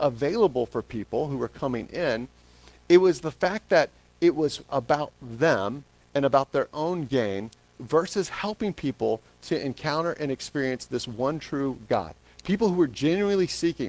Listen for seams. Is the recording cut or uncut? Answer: uncut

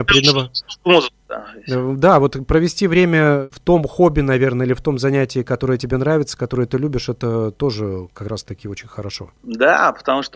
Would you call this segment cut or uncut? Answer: uncut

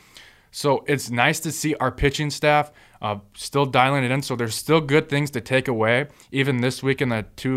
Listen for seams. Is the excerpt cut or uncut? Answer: uncut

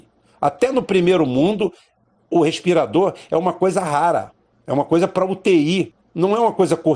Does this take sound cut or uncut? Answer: uncut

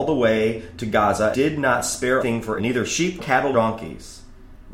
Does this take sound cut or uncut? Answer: cut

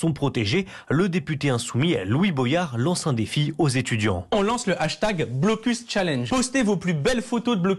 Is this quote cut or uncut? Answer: uncut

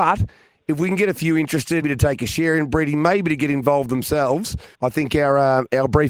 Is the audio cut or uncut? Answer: cut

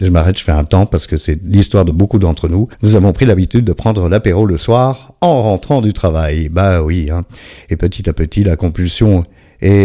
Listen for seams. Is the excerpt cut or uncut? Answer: cut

